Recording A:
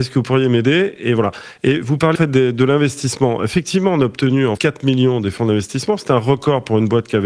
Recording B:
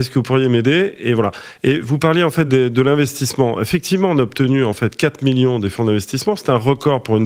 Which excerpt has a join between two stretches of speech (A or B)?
A